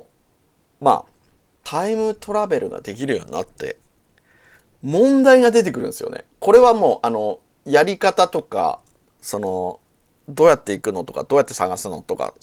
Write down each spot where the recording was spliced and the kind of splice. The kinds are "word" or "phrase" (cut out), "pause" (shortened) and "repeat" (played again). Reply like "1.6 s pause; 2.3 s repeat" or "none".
6.3 s pause